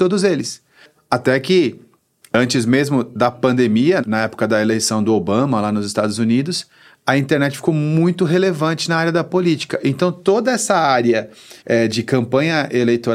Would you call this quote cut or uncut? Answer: cut